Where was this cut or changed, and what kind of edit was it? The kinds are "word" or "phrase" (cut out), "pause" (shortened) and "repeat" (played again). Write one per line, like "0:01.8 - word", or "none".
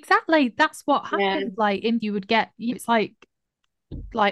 0:02.0 - word
0:02.7 - word

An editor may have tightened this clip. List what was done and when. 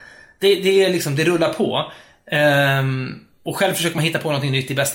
none

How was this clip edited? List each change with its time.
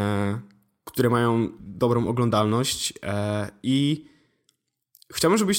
0:01.6 - word

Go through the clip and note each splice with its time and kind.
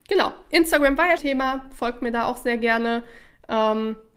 0:01.2 - word

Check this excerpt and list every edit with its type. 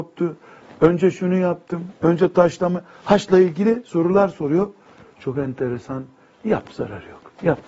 none

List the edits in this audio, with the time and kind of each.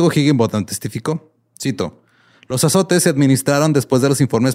none

